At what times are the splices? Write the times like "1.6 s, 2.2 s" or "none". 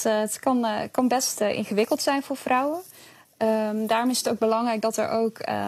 none